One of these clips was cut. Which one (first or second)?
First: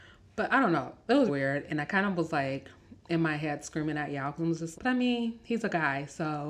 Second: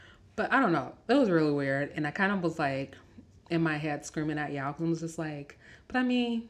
first